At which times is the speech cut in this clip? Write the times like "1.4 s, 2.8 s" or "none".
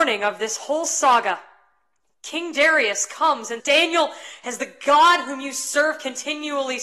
3.6 s